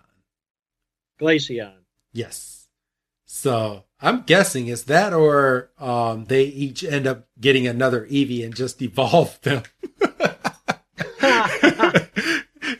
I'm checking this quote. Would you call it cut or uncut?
uncut